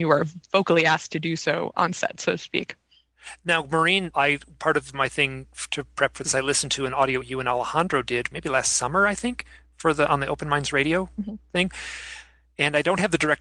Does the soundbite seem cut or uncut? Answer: cut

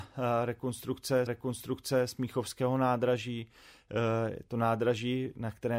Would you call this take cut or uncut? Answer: cut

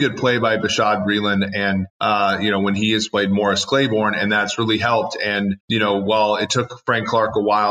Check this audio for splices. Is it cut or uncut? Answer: cut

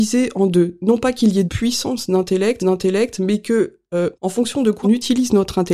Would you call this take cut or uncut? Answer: cut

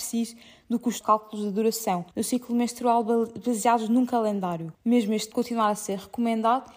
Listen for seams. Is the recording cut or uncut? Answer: cut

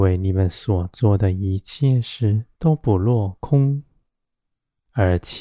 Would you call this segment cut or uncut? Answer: cut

